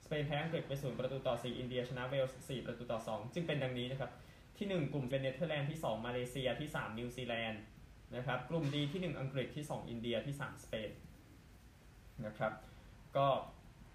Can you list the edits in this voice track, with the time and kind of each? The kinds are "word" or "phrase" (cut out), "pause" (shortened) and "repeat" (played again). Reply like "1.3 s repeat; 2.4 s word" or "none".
5.1 s word